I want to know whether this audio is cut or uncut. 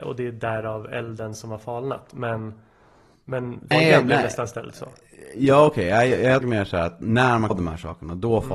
cut